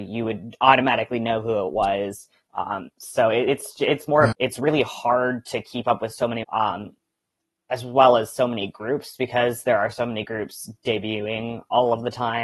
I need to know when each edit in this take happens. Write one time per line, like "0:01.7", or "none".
0:04.3
0:06.4